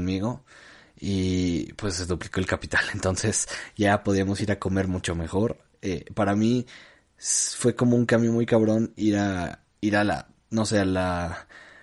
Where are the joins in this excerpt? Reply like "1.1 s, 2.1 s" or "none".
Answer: none